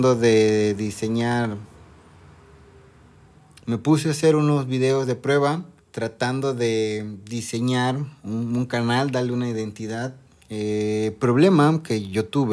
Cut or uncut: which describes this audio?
cut